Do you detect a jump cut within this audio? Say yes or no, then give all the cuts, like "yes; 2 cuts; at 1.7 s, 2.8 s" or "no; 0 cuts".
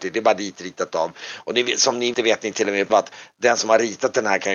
yes; 2 cuts; at 2.1 s, 2.9 s